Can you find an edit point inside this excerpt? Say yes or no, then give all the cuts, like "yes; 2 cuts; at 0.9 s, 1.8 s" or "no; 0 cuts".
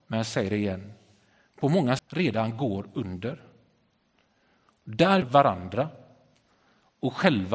yes; 2 cuts; at 2.0 s, 5.2 s